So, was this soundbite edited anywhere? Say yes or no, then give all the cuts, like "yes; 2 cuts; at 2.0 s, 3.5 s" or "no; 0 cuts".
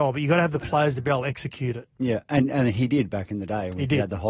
no; 0 cuts